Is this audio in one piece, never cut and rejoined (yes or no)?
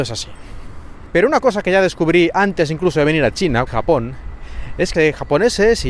no